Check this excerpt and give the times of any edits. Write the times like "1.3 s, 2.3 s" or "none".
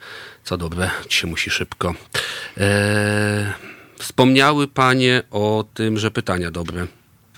1.1 s